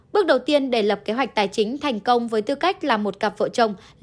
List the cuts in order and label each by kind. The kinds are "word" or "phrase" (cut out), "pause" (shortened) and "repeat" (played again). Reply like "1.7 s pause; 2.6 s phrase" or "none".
none